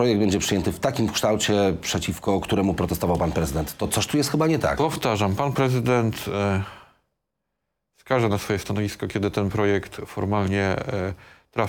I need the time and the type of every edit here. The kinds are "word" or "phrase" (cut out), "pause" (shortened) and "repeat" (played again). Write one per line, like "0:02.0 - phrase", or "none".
none